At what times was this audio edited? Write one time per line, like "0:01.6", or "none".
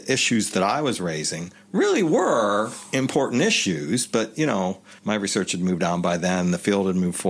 0:05.0